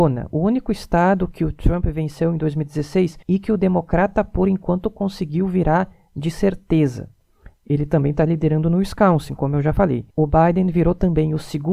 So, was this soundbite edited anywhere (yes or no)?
yes